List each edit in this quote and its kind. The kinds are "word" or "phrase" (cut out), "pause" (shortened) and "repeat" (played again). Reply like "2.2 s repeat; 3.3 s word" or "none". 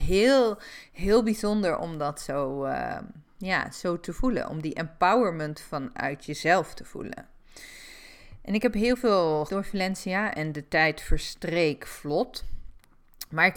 9.5 s phrase